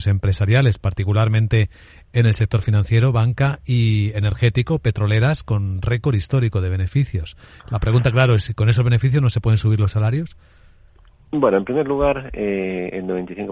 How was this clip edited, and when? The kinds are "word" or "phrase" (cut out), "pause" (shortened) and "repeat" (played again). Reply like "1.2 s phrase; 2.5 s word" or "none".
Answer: none

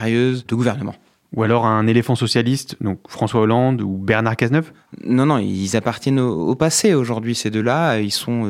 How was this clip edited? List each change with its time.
none

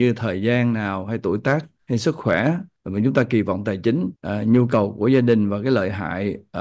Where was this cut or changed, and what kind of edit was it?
4.2 s pause

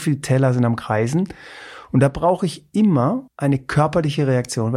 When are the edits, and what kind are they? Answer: 3.3 s pause

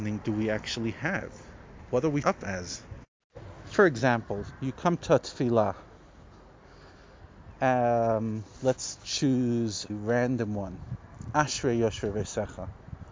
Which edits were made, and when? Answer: 2.2 s word; 9.9 s word

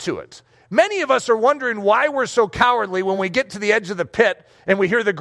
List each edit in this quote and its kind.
none

